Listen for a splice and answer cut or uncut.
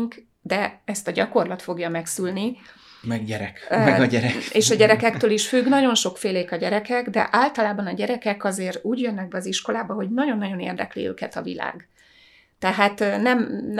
uncut